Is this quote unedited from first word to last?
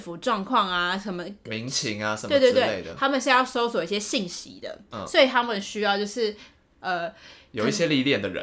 yes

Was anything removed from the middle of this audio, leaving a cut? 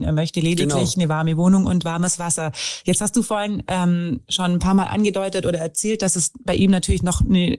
no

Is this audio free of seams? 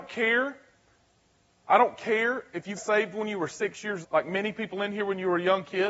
no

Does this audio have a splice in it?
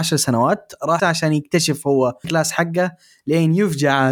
yes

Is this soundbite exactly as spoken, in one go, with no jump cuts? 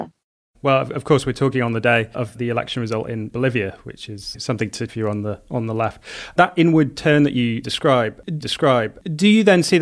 no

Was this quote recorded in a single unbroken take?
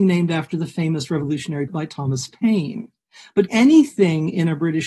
no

